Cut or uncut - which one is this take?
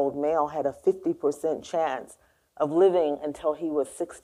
uncut